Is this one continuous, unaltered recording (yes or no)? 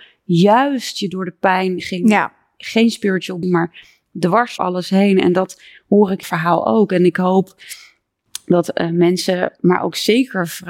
no